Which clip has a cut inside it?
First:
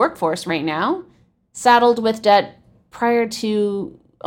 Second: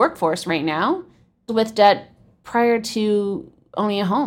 second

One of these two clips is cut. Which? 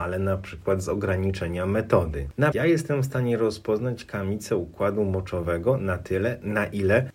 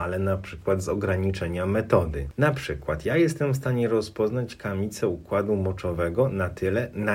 first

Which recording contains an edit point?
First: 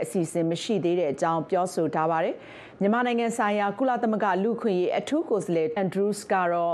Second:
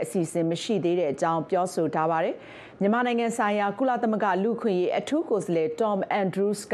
first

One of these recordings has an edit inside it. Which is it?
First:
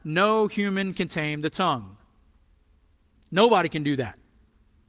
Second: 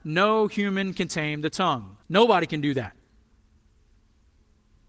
second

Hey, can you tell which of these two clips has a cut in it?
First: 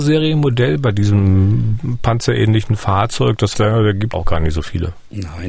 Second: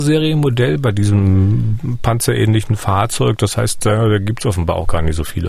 first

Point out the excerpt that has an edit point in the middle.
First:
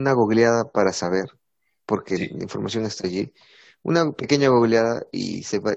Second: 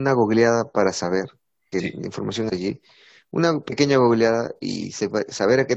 second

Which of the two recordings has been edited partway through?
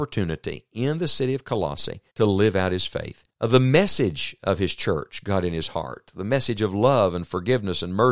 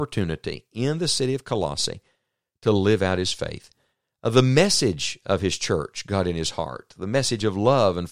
first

